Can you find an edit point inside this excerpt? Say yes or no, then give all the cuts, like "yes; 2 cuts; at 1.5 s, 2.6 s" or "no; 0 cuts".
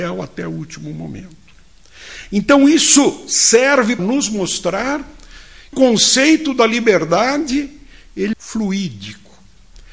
yes; 3 cuts; at 4.0 s, 5.7 s, 8.3 s